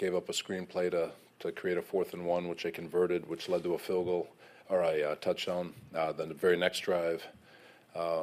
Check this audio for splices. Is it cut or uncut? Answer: uncut